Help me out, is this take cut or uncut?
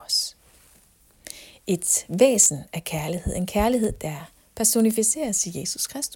uncut